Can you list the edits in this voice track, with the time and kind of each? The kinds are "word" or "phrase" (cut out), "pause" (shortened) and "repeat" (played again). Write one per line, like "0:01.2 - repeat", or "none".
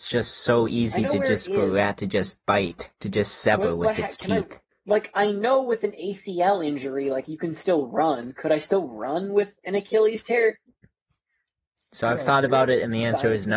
0:02.9 - pause
0:04.7 - pause